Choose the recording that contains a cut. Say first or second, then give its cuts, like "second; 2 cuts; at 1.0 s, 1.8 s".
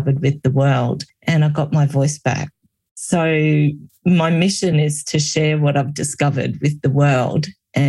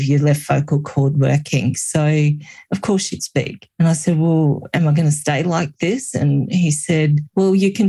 second; 1 cut; at 3.2 s